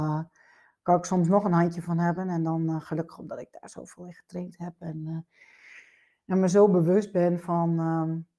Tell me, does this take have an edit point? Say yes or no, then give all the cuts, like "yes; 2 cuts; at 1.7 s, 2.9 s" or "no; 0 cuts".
no; 0 cuts